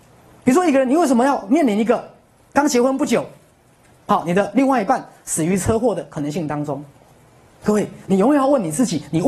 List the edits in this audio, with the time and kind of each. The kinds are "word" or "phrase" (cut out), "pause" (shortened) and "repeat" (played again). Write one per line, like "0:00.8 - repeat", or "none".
none